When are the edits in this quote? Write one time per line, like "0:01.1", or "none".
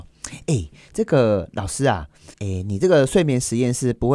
0:02.3